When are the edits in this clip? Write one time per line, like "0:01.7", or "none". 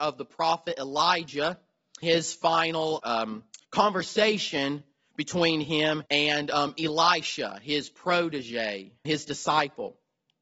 0:02.0
0:03.0
0:03.6
0:06.1
0:09.0